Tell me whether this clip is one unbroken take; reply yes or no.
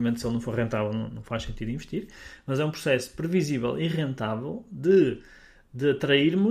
yes